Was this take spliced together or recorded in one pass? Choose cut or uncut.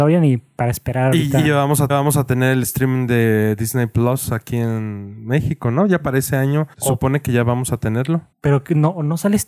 cut